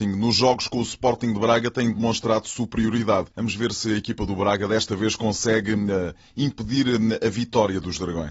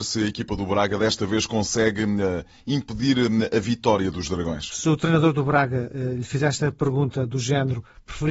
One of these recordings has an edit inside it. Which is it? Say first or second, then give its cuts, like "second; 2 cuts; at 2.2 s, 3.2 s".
first; 1 cut; at 3.3 s